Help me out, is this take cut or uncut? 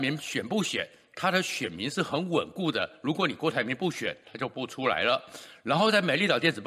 uncut